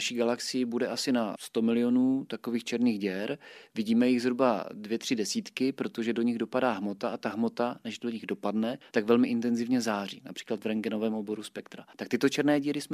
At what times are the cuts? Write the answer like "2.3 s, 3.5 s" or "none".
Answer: 11.9 s

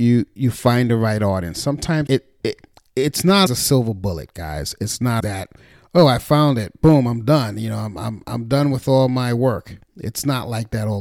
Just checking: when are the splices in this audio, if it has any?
2.1 s, 3.5 s, 5.2 s

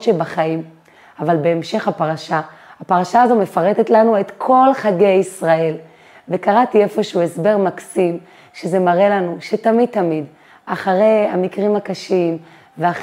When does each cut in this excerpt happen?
none

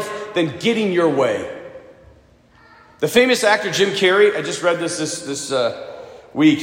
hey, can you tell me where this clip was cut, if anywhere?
none

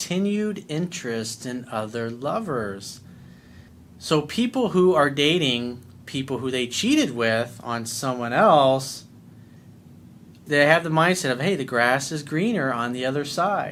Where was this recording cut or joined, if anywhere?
3.7 s, 10.5 s

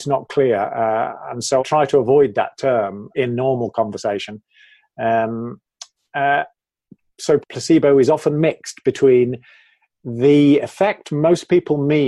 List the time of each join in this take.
1.6 s, 3.1 s, 7.4 s

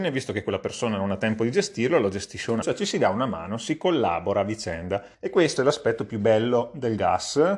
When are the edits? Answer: 2.6 s, 5.1 s, 5.6 s

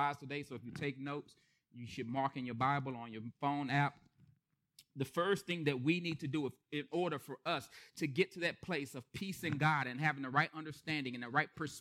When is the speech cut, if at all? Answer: none

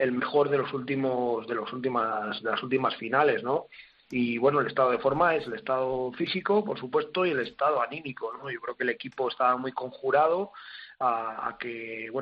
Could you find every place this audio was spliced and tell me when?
none

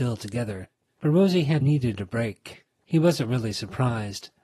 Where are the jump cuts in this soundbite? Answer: 1.6 s

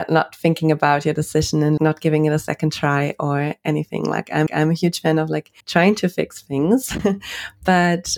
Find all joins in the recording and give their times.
1.8 s, 4.5 s, 5.6 s

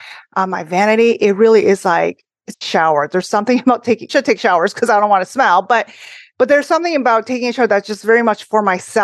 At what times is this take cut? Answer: 2.5 s, 4.1 s

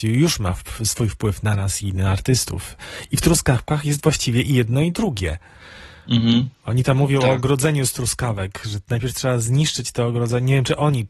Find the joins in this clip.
none

